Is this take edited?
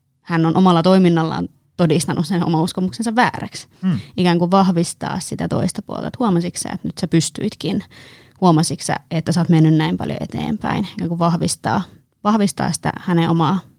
no; 0 cuts

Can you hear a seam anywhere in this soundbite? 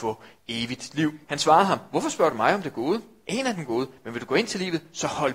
yes; 1 cut; at 1.2 s

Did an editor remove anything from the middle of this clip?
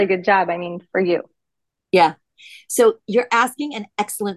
no; 0 cuts

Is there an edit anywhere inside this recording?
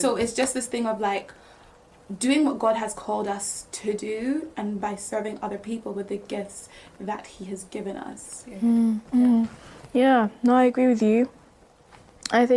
no; 0 cuts

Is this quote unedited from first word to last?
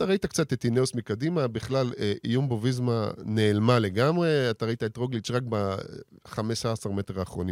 yes; 0 cuts

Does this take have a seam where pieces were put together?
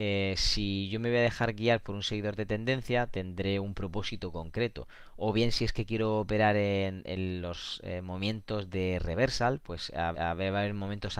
yes; 1 cut; at 10.1 s

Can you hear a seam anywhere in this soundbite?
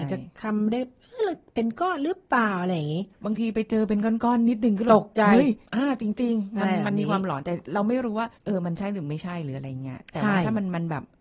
yes; 3 cuts; at 3.1 s, 5.7 s, 8.4 s

